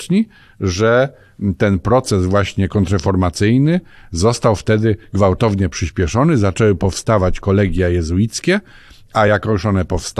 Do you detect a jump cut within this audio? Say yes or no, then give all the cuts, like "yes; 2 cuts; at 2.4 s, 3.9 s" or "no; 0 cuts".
no; 0 cuts